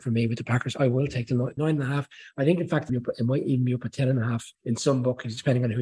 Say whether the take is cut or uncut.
cut